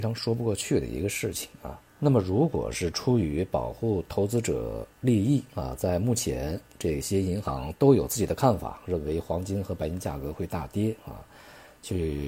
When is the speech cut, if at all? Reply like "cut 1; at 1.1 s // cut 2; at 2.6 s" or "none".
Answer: cut 1; at 1.9 s